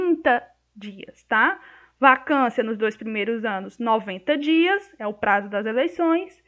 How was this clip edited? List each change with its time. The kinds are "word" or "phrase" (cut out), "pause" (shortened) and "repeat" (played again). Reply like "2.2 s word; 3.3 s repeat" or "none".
none